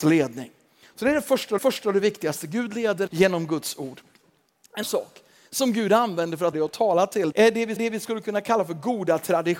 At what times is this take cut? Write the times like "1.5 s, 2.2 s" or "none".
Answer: 1.6 s, 3.1 s, 4.8 s, 6.5 s, 7.3 s, 7.8 s